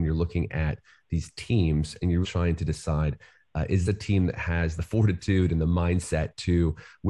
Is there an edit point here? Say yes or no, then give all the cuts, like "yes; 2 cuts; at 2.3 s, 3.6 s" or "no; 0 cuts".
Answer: yes; 3 cuts; at 2.2 s, 3.8 s, 4.8 s